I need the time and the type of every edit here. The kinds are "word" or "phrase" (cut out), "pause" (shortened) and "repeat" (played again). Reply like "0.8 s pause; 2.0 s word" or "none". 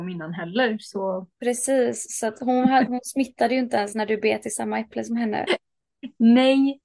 none